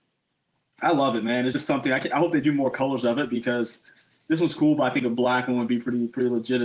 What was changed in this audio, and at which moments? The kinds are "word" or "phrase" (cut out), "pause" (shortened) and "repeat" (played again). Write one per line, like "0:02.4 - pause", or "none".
none